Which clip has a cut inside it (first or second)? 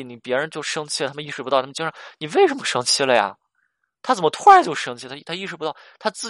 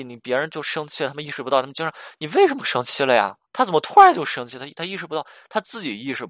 second